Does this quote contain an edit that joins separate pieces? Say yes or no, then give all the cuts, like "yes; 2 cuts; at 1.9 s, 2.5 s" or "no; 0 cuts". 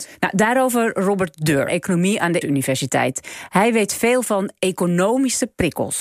yes; 2 cuts; at 1.7 s, 2.4 s